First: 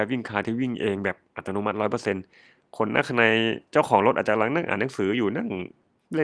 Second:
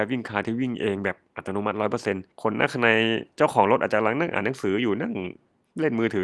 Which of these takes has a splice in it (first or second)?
second